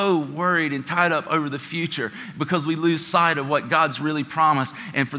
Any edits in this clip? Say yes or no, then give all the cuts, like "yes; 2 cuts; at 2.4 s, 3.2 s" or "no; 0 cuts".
no; 0 cuts